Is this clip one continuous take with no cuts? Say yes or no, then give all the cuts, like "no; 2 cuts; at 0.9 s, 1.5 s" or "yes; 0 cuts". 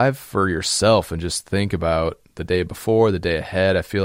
no; 1 cut; at 2.3 s